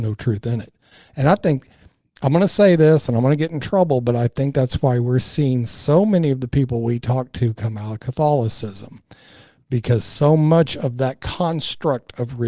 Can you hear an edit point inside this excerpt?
no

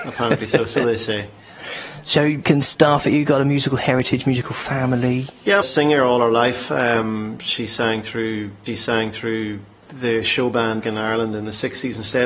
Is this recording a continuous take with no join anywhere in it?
no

